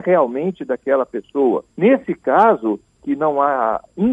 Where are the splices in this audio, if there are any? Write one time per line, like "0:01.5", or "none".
0:01.7
0:03.0